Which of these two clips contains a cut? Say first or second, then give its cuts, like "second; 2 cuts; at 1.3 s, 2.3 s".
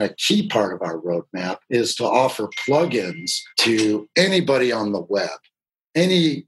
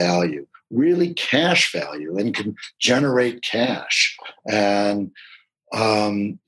first; 2 cuts; at 1.6 s, 3.5 s